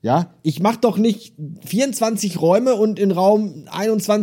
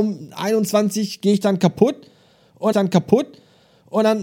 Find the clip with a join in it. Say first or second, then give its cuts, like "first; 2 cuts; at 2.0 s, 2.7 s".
second; 1 cut; at 2.7 s